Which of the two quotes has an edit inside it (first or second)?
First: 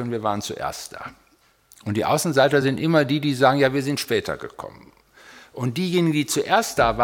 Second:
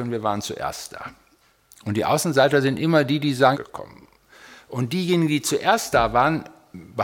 second